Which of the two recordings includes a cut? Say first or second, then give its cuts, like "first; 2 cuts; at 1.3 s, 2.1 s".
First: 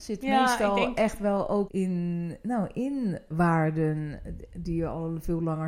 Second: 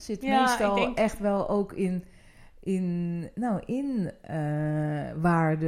first; 2 cuts; at 1.7 s, 3.3 s